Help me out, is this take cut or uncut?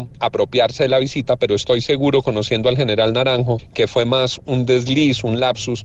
uncut